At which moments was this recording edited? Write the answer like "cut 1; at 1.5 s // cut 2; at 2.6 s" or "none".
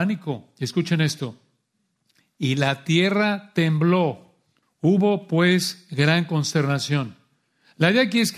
cut 1; at 4.6 s